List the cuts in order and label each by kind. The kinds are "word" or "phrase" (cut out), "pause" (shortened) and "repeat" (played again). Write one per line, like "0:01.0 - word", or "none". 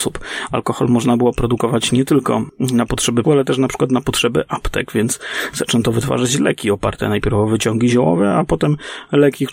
0:03.2 - word